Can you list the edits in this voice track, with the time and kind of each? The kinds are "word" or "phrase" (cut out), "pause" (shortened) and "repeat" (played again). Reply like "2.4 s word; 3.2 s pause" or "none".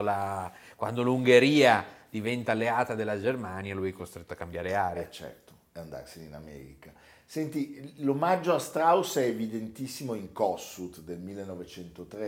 none